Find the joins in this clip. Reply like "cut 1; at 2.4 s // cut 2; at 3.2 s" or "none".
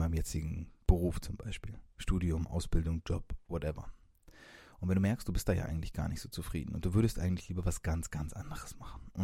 none